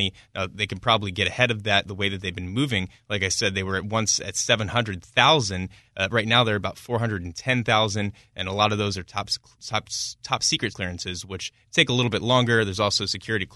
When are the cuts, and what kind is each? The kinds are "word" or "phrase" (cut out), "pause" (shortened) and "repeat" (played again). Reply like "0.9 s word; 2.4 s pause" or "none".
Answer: 10.7 s word